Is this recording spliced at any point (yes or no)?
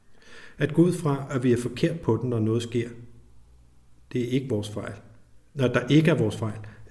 no